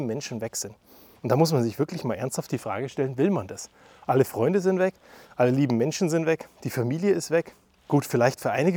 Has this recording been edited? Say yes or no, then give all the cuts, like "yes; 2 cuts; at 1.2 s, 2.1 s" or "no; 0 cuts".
no; 0 cuts